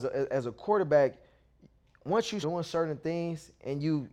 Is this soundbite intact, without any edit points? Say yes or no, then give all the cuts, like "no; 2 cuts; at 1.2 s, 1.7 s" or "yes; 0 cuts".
no; 1 cut; at 2.4 s